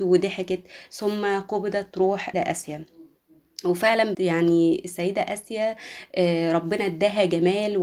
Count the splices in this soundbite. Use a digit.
2